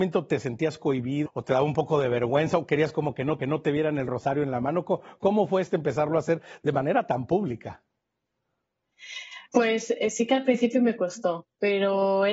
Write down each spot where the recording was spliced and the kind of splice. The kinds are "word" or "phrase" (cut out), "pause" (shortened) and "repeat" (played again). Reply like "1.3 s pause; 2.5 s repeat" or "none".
1.3 s word; 3.4 s repeat; 9.5 s pause